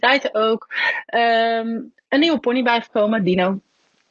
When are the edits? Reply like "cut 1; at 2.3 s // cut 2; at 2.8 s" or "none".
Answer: none

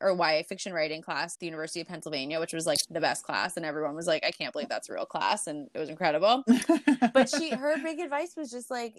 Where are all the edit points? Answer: cut 1; at 1.3 s

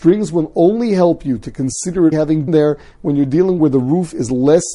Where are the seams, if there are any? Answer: cut 1; at 2.1 s // cut 2; at 2.5 s // cut 3; at 3.6 s

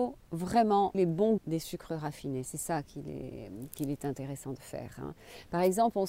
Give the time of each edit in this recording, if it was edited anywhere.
cut 1; at 0.9 s // cut 2; at 1.4 s

